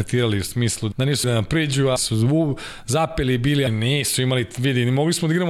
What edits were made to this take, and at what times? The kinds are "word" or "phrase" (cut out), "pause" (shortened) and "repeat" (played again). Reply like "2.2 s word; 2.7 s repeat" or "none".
0.9 s word; 1.2 s word; 2.0 s word; 3.7 s word